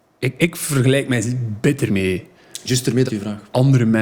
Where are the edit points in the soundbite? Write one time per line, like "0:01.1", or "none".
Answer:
0:01.9
0:03.1